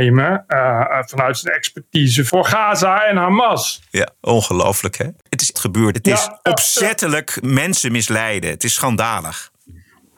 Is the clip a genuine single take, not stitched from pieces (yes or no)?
no